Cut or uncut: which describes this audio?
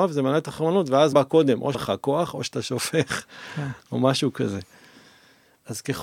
cut